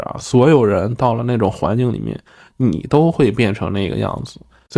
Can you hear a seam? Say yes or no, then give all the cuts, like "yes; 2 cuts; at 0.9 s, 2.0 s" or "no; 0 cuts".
no; 0 cuts